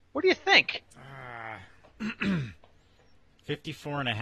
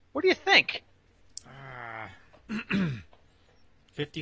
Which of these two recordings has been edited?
first; 1 cut; at 0.9 s

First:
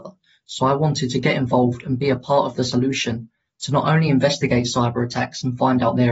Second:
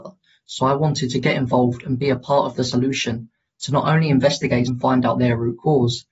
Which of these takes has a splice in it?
second; 1 cut; at 4.6 s

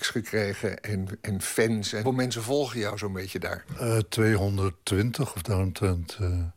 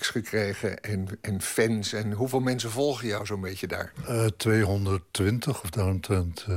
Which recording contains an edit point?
first; 1 cut; at 2.0 s

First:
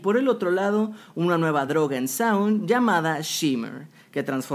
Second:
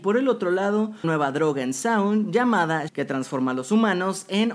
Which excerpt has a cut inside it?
second; 2 cuts; at 1.0 s, 2.9 s

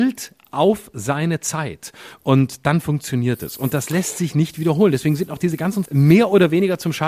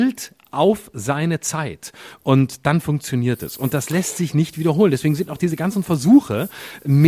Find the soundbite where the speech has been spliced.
first; 1 cut; at 5.9 s

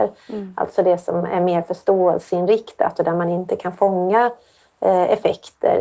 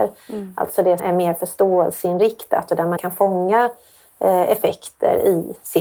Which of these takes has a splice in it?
second; 2 cuts; at 1.0 s, 3.0 s

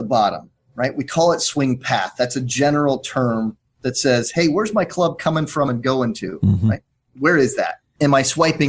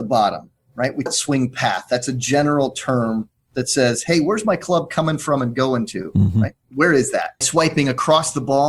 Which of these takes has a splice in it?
second; 3 cuts; at 1.1 s, 6.6 s, 7.4 s

